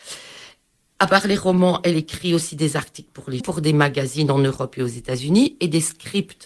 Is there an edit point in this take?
yes; 1 cut; at 3.4 s

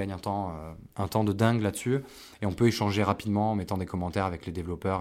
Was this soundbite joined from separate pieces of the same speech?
yes; 1 cut; at 0.9 s

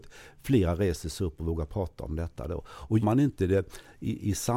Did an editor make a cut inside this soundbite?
yes; 1 cut; at 3.0 s

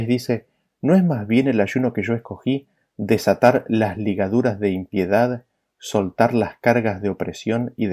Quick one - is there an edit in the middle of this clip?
no; 0 cuts

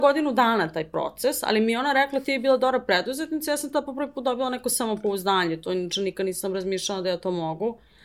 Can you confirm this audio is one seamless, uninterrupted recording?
yes; 0 cuts

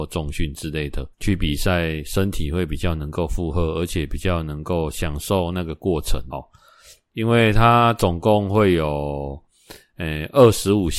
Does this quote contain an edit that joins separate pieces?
yes; 2 cuts; at 1.1 s, 6.3 s

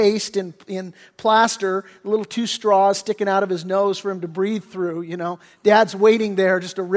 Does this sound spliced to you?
no; 0 cuts

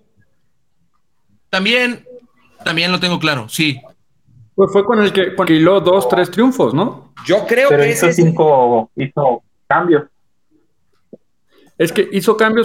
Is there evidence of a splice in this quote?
yes; 1 cut; at 5.4 s

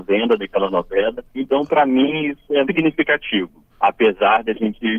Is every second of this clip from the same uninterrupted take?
no; 3 cuts; at 1.3 s, 2.6 s, 3.7 s

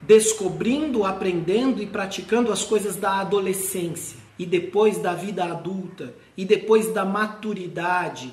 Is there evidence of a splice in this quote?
yes; 1 cut; at 4.3 s

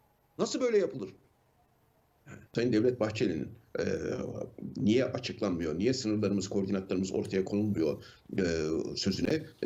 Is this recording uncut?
no; 1 cut; at 2.5 s

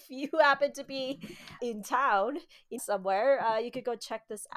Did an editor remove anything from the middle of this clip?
yes; 2 cuts; at 1.6 s, 2.8 s

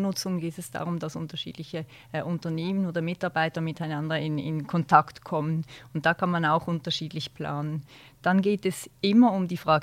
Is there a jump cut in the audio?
no; 0 cuts

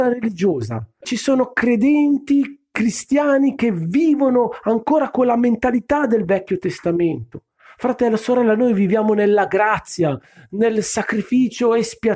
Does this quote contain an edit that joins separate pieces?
no; 0 cuts

